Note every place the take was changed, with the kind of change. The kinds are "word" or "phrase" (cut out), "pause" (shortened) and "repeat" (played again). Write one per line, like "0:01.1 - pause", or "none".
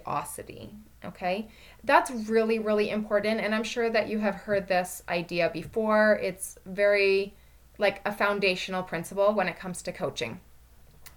none

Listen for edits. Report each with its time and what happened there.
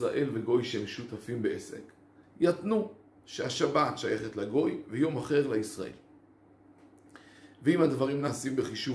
0:02.2 - pause

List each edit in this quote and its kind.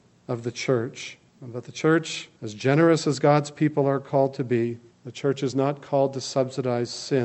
0:01.3 - pause
0:02.4 - pause
0:04.9 - pause

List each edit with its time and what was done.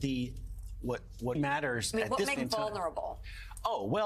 0:01.3 - word
0:02.4 - word

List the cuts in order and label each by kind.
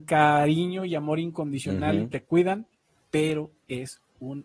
none

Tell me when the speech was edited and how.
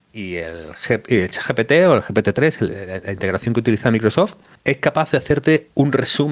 none

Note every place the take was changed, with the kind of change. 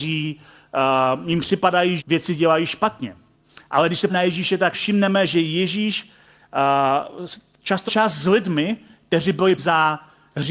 0:02.0 - word
0:04.1 - word
0:04.7 - word
0:07.9 - word
0:09.6 - word

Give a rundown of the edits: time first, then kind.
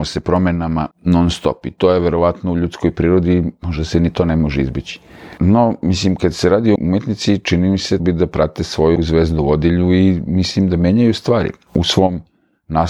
0:00.9 - pause
0:06.8 - word
0:08.0 - word
0:09.0 - word

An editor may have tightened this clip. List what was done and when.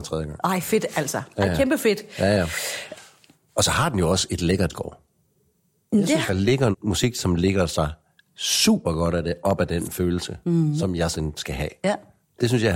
0:04.7 - word
0:06.3 - word
0:06.7 - word
0:11.1 - word

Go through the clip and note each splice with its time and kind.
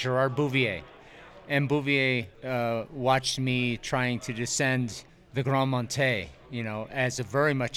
0:02.3 - pause
0:05.1 - pause

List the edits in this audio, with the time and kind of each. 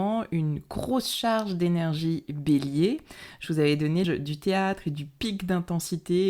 0:04.0 - word

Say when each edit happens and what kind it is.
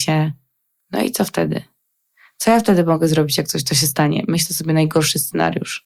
none

